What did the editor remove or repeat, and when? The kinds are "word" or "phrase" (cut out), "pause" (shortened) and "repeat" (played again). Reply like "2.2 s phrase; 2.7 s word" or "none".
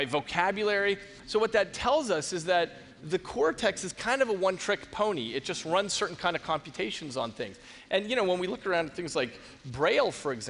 none